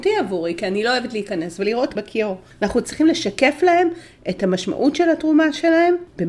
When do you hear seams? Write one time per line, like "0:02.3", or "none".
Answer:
0:02.0